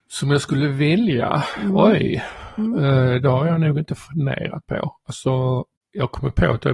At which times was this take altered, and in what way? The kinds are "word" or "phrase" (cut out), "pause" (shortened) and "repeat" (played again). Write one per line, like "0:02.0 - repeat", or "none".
none